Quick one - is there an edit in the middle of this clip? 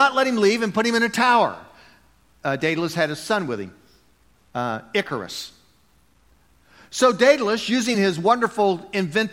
no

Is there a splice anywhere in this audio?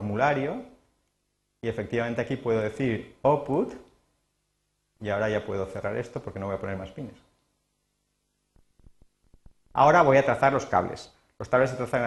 no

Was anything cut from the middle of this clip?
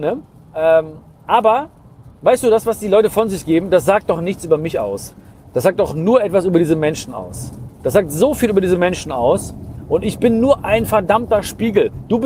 no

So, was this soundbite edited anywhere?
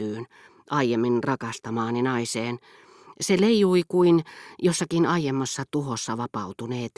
no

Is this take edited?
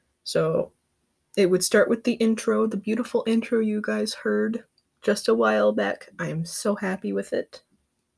yes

